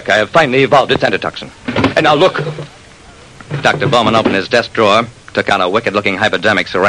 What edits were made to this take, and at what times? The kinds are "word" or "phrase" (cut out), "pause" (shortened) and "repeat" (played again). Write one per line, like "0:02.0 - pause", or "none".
none